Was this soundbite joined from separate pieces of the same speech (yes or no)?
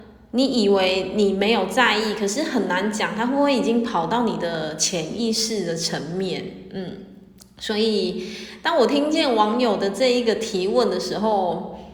no